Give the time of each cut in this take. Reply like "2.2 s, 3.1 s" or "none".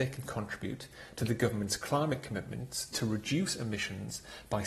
none